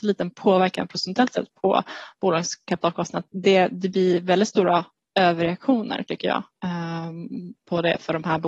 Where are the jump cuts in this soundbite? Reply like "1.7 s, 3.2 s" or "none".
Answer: none